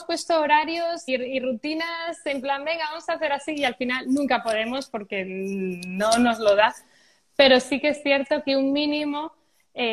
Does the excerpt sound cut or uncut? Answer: cut